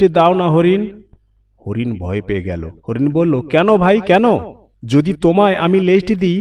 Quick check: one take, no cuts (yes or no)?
no